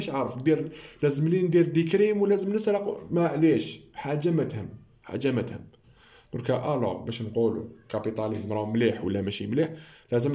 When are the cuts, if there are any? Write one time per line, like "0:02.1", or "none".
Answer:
none